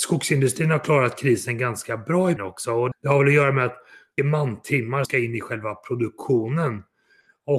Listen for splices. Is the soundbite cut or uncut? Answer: cut